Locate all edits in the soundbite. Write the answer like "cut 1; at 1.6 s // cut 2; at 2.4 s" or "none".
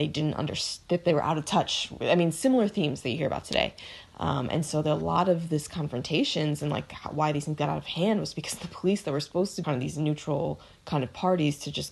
cut 1; at 9.6 s